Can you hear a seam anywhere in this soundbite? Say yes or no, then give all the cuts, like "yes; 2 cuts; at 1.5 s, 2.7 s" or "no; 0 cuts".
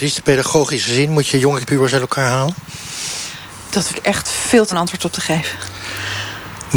yes; 3 cuts; at 1.6 s, 3.9 s, 4.7 s